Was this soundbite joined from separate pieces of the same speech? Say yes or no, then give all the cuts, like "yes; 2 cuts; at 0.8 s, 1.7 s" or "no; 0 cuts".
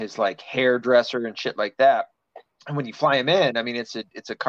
yes; 1 cut; at 2.5 s